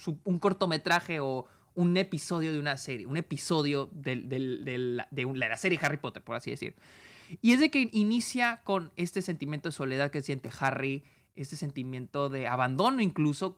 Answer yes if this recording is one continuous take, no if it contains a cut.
yes